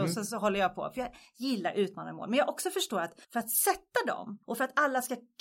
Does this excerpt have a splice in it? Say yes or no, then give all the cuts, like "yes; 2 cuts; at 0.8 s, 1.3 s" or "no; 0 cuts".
yes; 2 cuts; at 3.2 s, 4.4 s